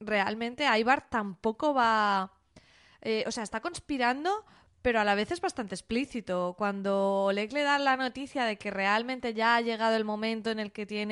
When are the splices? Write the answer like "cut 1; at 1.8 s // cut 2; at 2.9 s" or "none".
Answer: none